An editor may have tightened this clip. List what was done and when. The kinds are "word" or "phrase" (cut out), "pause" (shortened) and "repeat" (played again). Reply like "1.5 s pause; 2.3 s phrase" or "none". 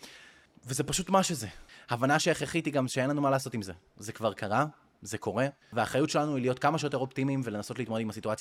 5.6 s pause

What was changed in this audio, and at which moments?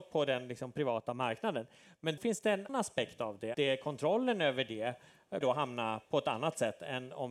2.2 s word; 2.7 s word; 3.5 s word; 5.4 s word

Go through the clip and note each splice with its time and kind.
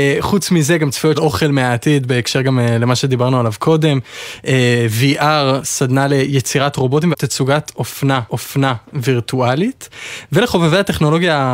1.1 s phrase; 7.1 s word; 8.3 s repeat

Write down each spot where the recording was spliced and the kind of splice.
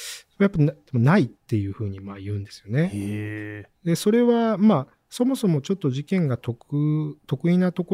1.4 s pause

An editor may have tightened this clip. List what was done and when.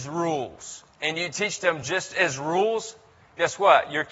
none

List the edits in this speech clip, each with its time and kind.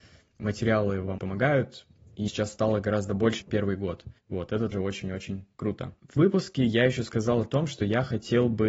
1.2 s word; 2.3 s word; 3.4 s word; 4.2 s pause; 4.7 s word; 6.2 s word

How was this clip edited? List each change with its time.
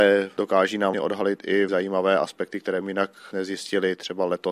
0.9 s word; 1.7 s word; 2.8 s word; 3.3 s word

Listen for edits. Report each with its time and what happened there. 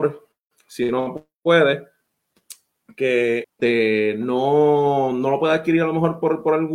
3.4 s word

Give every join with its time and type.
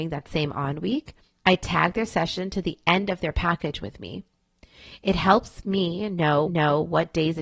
6.5 s repeat

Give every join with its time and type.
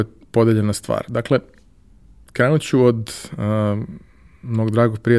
none

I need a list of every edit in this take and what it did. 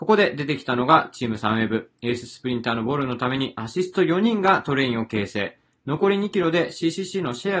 none

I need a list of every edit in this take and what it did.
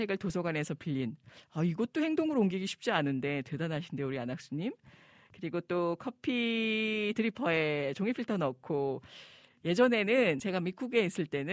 none

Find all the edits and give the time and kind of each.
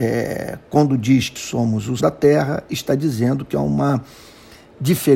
1.4 s word; 2.0 s word

